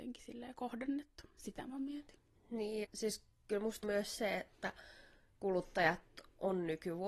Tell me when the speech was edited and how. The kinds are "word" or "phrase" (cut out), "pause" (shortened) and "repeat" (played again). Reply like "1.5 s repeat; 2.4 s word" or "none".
2.8 s word; 3.8 s word